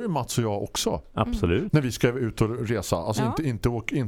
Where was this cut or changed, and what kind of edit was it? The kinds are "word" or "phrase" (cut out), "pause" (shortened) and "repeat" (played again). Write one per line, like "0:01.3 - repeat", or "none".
none